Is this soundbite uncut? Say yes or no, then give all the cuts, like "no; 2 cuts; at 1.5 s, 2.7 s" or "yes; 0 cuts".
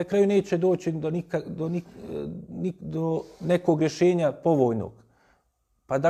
yes; 0 cuts